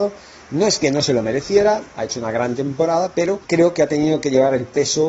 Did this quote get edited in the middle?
yes; 1 cut; at 3.4 s

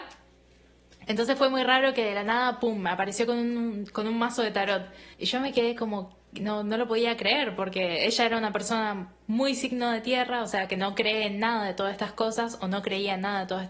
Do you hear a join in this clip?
yes; 1 cut; at 5.1 s

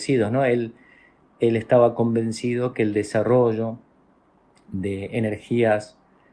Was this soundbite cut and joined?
no; 0 cuts

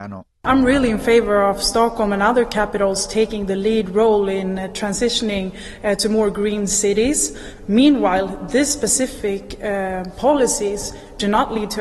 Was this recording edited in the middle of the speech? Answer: no; 0 cuts

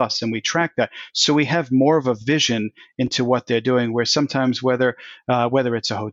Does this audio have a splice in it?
no; 0 cuts

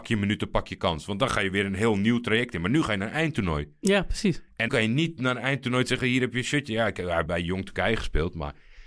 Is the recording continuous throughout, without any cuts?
no; 2 cuts; at 4.7 s, 7.3 s

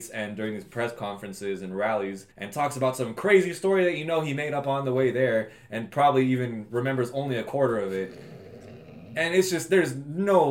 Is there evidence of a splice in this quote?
yes; 1 cut; at 2.3 s

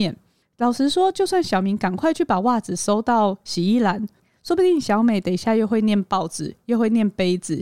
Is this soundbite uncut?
yes; 0 cuts

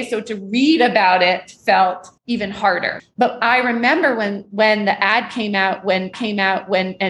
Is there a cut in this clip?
yes; 2 cuts; at 2.2 s, 6.1 s

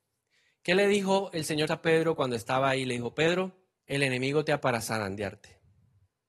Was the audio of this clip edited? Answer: yes; 3 cuts; at 1.7 s, 3.8 s, 4.6 s

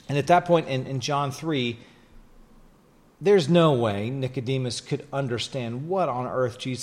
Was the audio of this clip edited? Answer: no; 0 cuts

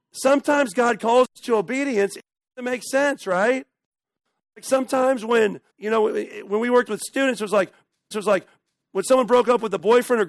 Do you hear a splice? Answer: yes; 2 cuts; at 5.7 s, 8.1 s

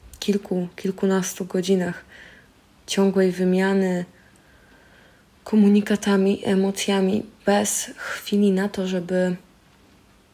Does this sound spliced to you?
no; 0 cuts

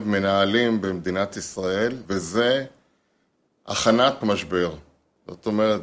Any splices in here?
yes; 2 cuts; at 2.1 s, 4.2 s

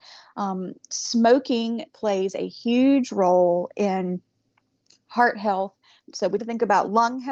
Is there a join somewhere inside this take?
yes; 1 cut; at 6.4 s

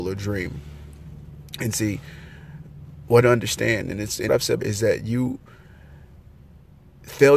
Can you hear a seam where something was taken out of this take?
yes; 3 cuts; at 3.2 s, 4.3 s, 4.6 s

